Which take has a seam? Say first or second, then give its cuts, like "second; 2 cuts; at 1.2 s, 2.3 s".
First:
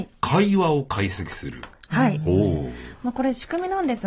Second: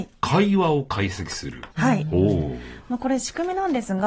second; 1 cut; at 1.7 s